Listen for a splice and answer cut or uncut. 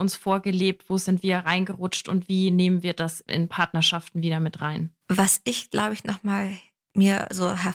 uncut